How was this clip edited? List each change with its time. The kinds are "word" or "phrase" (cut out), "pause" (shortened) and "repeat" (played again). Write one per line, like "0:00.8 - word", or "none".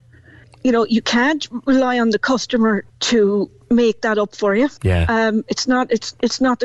0:02.9 - pause
0:04.8 - pause